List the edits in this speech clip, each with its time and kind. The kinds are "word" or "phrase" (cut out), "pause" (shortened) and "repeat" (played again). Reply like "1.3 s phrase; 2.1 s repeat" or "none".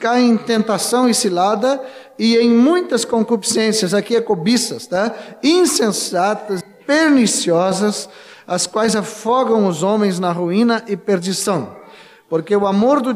6.6 s word